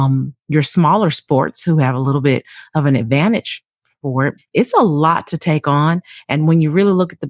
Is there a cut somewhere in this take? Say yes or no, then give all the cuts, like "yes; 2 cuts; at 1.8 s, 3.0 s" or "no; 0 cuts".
yes; 1 cut; at 4.4 s